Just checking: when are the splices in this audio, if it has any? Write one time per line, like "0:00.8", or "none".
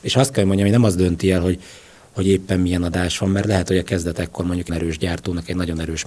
0:04.7